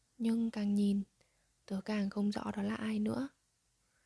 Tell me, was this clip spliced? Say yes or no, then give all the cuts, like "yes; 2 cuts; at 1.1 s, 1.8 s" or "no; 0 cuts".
no; 0 cuts